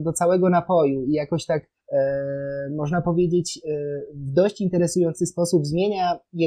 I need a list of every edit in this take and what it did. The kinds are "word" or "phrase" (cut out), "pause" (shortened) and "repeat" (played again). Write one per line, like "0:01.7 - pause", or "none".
none

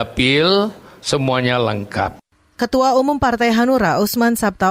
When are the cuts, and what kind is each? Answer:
none

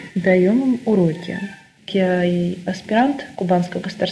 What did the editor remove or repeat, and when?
none

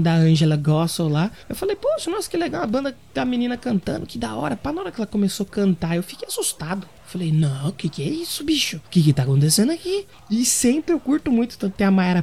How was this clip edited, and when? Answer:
0:01.4 - pause
0:08.8 - pause
0:10.1 - pause

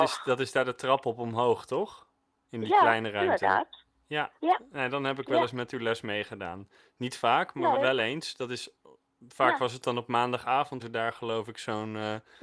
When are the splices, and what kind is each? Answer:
0:04.4 - pause
0:07.7 - word
0:10.8 - word

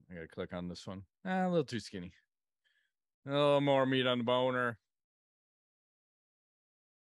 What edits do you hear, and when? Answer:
0:01.1 - pause

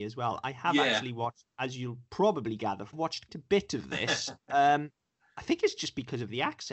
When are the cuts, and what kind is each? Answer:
0:02.9 - phrase
0:03.3 - word

